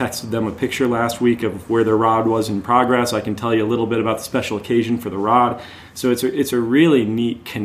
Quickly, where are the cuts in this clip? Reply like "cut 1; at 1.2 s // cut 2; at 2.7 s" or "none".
none